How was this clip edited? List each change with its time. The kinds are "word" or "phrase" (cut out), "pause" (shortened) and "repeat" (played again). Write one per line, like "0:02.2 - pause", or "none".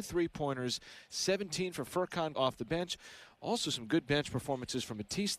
0:02.3 - word